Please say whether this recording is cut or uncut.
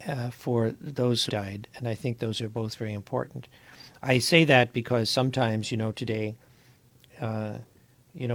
cut